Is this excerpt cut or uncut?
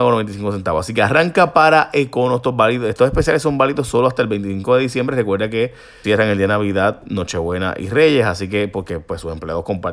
cut